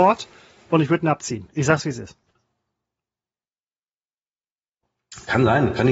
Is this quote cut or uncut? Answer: uncut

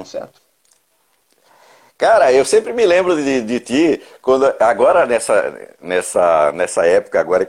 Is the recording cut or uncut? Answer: uncut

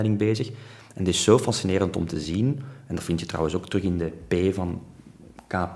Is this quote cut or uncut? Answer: uncut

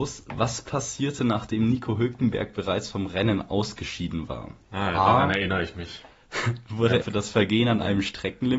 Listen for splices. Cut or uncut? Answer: cut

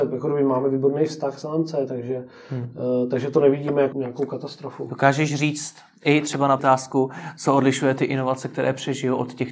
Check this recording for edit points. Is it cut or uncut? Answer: cut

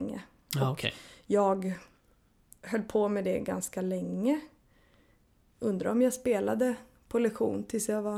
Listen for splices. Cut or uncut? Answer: uncut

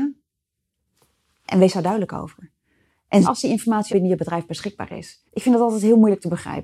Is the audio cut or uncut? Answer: cut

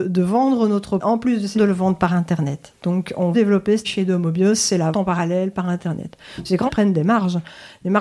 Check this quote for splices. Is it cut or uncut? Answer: cut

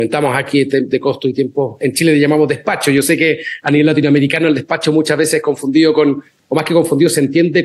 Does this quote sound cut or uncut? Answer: uncut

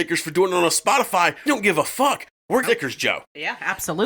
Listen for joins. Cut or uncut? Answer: cut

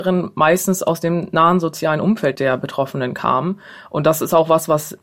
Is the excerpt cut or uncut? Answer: uncut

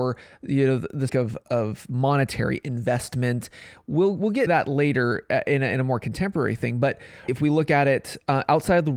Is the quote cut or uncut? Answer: cut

